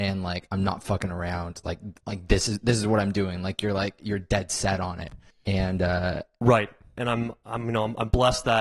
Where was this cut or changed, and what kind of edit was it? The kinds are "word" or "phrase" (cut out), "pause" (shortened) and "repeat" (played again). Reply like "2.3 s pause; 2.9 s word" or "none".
5.3 s pause

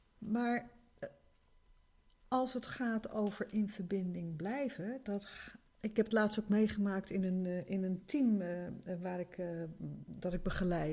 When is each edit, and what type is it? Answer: none

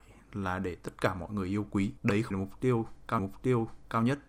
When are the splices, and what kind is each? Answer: 2.0 s pause; 2.3 s word; 3.2 s repeat

